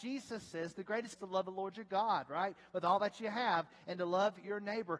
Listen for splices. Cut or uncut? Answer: cut